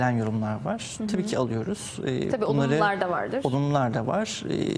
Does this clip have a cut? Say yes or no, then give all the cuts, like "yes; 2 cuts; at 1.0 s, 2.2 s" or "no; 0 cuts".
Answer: no; 0 cuts